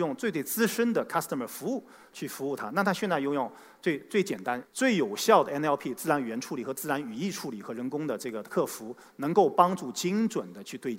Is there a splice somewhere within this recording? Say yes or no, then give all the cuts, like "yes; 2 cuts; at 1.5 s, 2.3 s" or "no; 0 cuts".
no; 0 cuts